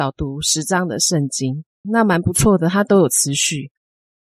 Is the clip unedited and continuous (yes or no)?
no